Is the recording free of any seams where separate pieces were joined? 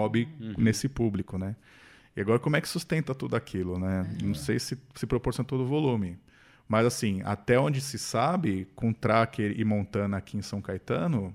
yes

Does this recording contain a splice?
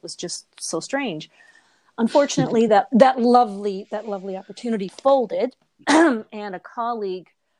no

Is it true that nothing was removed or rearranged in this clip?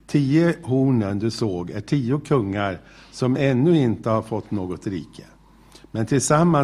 yes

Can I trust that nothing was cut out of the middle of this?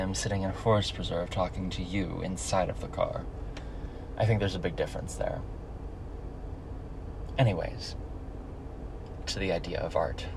no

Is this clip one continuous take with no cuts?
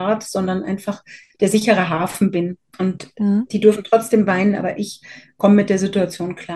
yes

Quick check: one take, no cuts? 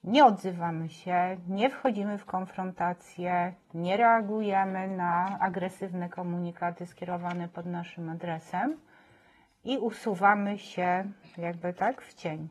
yes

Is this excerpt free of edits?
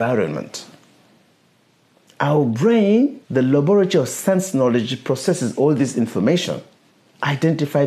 no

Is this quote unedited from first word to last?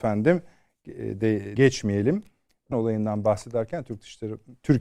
no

